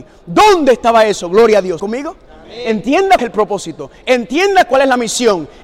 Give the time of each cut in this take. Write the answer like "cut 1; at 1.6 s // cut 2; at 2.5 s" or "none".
cut 1; at 1.8 s // cut 2; at 3.2 s